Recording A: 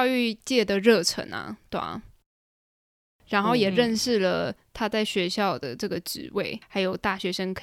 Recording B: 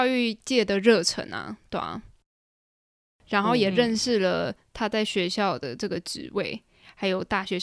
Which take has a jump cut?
A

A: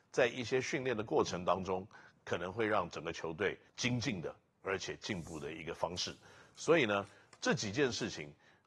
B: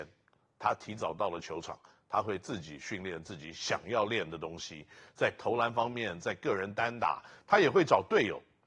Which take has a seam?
A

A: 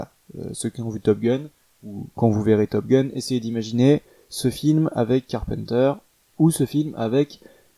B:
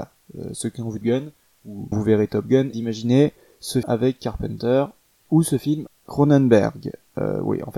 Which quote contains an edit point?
B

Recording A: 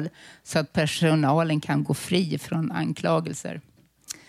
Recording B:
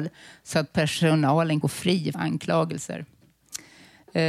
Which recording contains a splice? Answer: B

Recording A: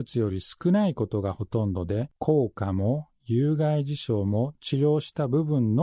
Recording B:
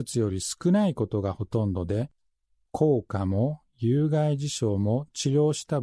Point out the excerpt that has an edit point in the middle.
A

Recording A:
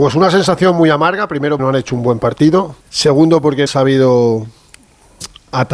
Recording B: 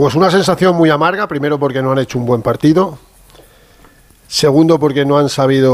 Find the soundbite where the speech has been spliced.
A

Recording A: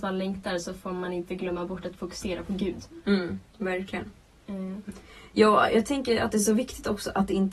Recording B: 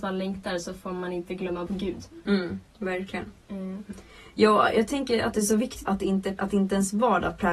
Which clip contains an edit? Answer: B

